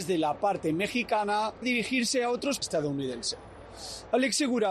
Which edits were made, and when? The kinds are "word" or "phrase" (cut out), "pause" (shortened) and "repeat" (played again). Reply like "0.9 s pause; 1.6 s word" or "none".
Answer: 1.6 s word; 2.6 s phrase